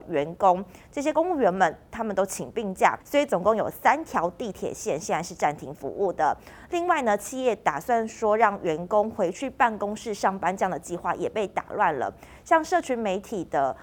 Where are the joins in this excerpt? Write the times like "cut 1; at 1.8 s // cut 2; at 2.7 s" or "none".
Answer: cut 1; at 3.0 s